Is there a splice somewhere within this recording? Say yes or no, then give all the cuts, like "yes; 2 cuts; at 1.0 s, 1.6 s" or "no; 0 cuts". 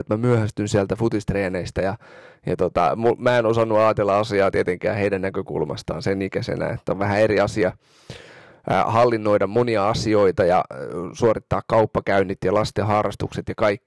no; 0 cuts